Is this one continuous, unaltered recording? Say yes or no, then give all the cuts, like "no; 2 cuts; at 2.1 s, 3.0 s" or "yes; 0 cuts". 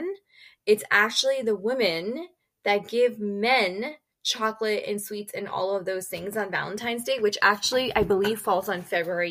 yes; 0 cuts